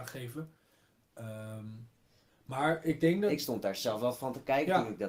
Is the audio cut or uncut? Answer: uncut